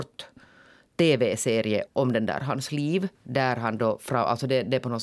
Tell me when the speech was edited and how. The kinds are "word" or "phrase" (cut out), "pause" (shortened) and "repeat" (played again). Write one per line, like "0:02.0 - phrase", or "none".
0:01.9 - word
0:03.1 - pause